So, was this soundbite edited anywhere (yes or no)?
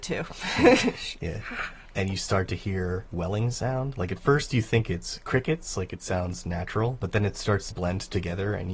yes